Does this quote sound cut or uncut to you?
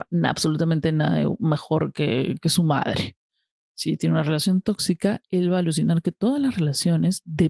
uncut